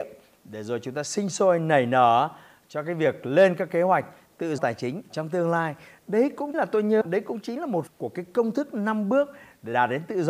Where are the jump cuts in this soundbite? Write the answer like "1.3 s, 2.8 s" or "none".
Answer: 4.6 s, 5.1 s, 6.5 s, 7.0 s, 7.9 s